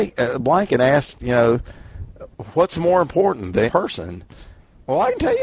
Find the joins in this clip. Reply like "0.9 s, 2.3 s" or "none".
3.6 s